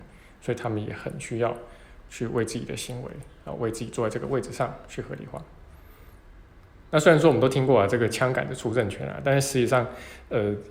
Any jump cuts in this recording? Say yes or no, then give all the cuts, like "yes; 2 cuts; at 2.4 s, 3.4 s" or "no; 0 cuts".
no; 0 cuts